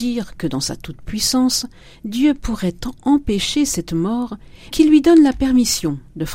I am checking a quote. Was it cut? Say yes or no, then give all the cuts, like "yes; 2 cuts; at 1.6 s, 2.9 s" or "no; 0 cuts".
yes; 1 cut; at 4.7 s